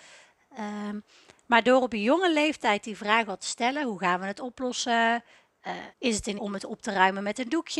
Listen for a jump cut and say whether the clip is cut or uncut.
cut